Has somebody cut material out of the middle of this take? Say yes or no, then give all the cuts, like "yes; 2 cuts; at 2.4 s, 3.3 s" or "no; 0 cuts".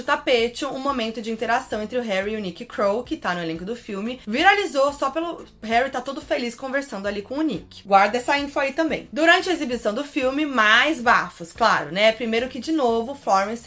no; 0 cuts